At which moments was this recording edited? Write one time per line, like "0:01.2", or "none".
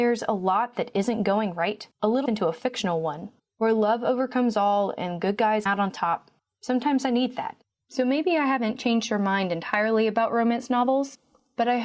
0:01.9
0:02.3
0:03.4
0:05.7
0:06.4
0:07.6

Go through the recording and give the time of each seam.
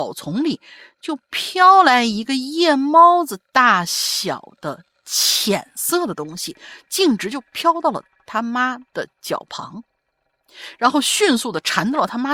0:08.9

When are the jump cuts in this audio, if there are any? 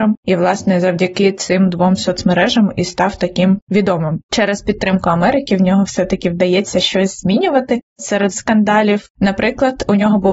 0:08.3

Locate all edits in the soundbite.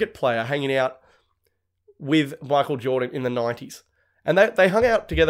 none

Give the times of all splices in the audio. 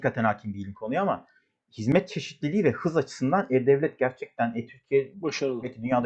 none

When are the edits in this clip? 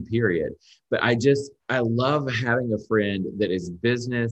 0:01.6

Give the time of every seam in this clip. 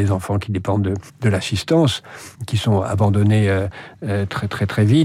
0:01.1
0:02.3

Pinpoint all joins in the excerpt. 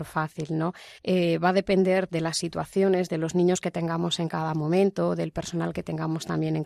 0:01.0
0:02.1

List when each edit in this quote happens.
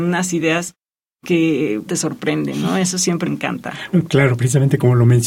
0:01.9
0:03.3

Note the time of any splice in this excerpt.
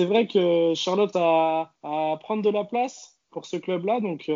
0:01.1
0:01.8

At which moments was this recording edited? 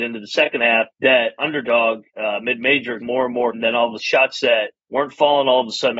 0:00.9
0:02.1
0:03.0
0:03.5
0:04.0
0:04.8

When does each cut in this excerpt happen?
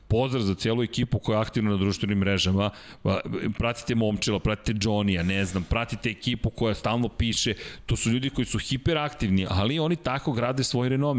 none

